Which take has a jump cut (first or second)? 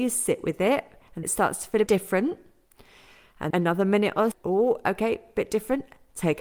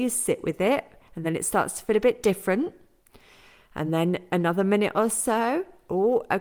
first